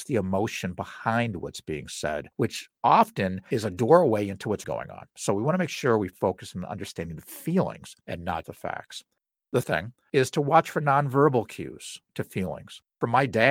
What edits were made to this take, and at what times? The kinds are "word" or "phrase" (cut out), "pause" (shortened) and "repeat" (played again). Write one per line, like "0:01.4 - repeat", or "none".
0:02.3 - pause
0:04.6 - word
0:05.1 - pause
0:08.0 - pause
0:08.4 - word
0:09.6 - word